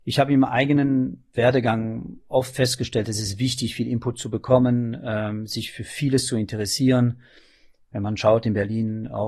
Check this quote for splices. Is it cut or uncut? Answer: uncut